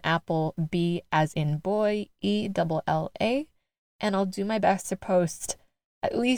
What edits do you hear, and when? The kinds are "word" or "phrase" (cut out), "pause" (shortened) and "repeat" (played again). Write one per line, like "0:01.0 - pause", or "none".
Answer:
none